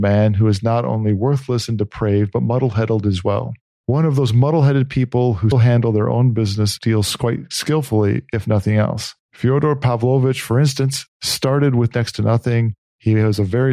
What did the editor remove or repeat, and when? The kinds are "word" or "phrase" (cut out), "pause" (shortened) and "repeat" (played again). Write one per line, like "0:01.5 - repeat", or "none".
0:05.5 - word
0:11.1 - pause